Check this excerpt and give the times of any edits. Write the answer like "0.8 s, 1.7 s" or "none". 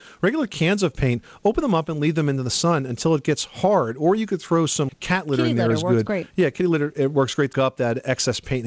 4.9 s, 7.5 s

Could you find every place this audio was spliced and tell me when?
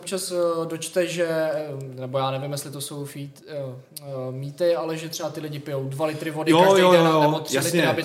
none

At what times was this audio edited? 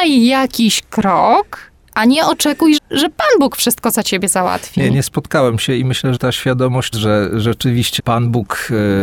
2.8 s, 6.2 s, 6.9 s, 8.0 s

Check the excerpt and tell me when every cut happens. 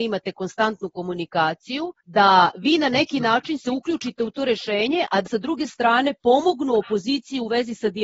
2.0 s, 5.3 s

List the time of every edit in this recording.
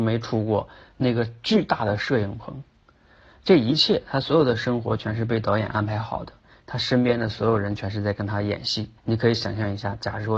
9.0 s

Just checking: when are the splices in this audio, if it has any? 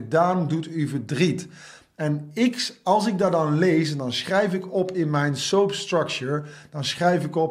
none

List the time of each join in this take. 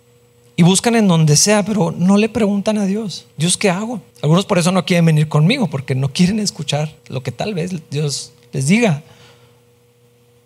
3.3 s, 4.1 s, 7.0 s

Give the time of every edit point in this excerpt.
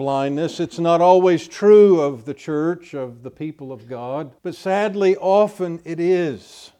4.4 s

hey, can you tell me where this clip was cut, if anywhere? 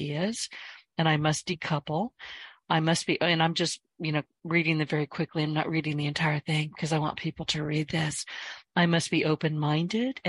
none

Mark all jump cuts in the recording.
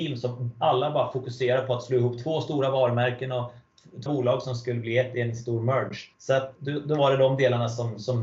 4.1 s, 6.1 s, 6.5 s

